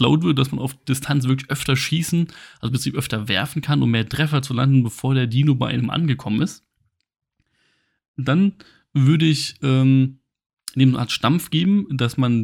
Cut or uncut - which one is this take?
uncut